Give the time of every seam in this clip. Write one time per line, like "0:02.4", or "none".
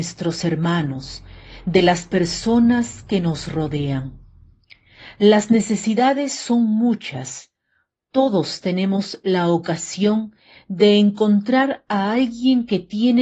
none